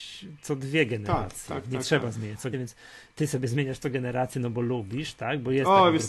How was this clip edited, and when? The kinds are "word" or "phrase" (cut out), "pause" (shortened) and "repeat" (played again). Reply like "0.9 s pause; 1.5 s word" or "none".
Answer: 2.5 s word; 3.1 s pause